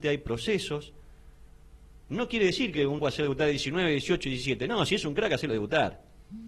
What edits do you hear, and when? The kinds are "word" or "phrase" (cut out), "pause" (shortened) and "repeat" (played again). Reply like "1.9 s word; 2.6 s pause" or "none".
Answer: 3.0 s word